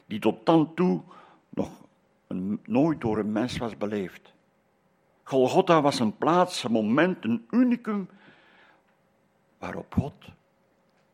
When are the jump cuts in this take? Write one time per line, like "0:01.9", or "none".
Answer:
none